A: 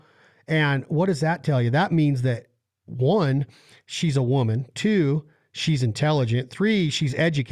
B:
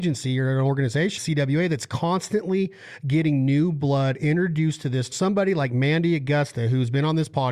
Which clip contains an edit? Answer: B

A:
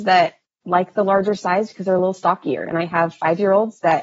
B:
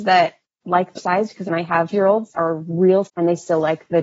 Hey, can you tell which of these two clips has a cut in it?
B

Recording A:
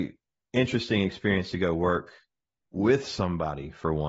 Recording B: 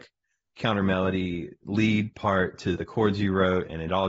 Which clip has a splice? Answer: B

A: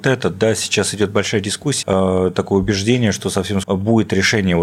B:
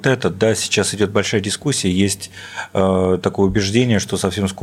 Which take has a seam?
A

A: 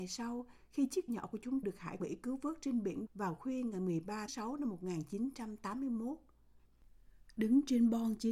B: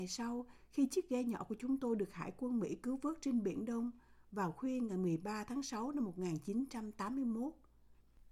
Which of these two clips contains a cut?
A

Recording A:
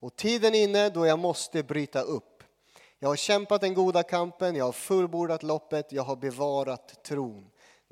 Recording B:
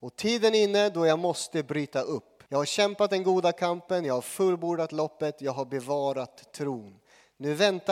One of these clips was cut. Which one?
B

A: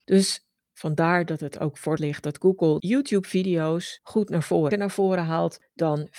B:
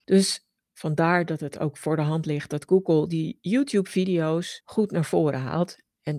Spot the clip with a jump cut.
A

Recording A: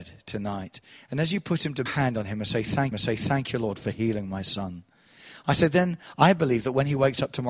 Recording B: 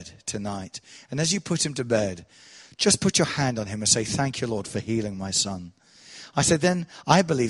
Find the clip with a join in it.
A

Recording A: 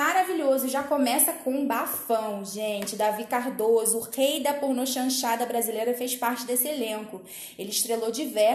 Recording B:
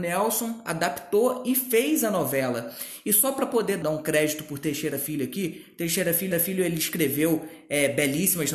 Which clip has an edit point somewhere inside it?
B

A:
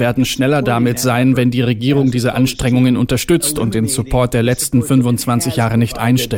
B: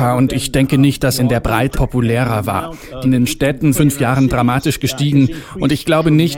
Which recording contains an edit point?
B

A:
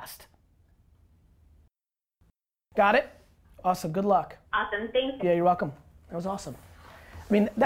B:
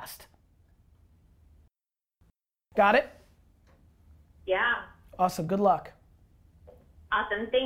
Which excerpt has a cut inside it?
A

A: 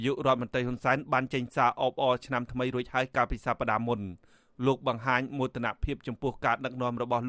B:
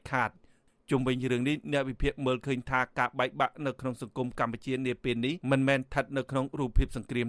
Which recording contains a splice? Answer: B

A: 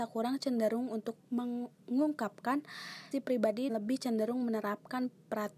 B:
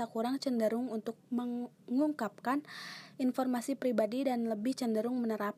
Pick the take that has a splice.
A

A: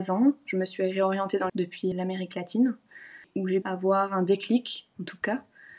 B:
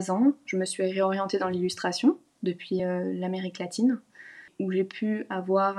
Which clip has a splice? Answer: A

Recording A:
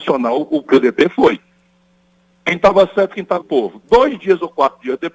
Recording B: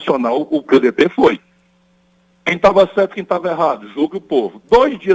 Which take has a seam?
A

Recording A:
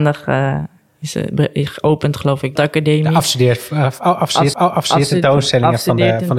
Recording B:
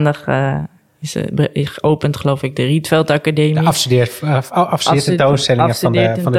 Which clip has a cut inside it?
A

